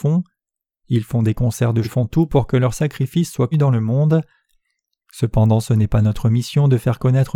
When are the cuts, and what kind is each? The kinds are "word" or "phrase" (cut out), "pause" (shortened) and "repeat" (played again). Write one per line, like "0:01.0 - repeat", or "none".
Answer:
0:01.8 - word
0:03.5 - word